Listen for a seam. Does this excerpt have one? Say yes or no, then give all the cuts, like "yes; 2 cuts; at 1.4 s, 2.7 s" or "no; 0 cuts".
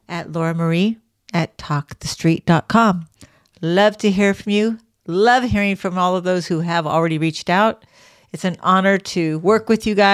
no; 0 cuts